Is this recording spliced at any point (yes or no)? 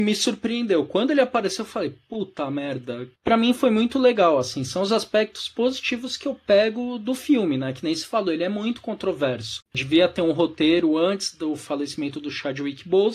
yes